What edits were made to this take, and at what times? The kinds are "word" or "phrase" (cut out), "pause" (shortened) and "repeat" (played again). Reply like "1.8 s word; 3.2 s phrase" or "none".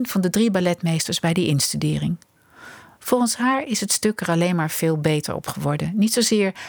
none

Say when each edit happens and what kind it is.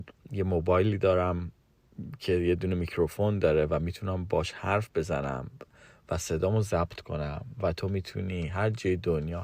none

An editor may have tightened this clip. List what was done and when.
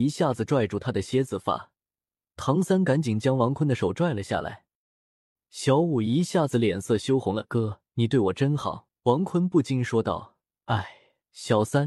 7.9 s pause; 9.0 s pause

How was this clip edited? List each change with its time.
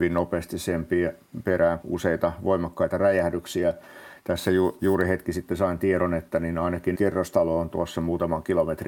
1.8 s word; 6.9 s word; 7.7 s word

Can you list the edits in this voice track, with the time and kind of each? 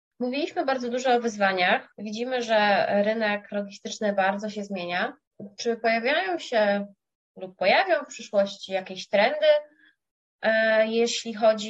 none

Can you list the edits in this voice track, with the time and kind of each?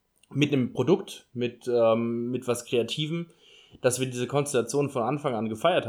none

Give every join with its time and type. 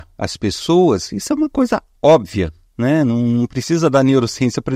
none

